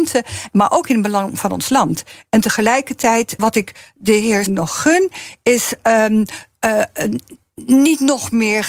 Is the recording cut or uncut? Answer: cut